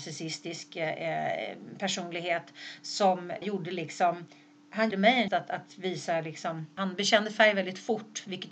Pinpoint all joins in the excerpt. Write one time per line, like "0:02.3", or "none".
0:03.4
0:04.9
0:05.3